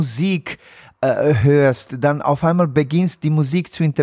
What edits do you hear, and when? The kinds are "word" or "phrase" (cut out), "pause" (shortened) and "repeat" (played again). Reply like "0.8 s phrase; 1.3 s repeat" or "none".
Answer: none